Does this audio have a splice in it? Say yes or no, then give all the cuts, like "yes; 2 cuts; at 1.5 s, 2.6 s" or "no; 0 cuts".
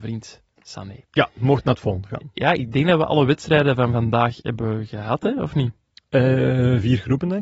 no; 0 cuts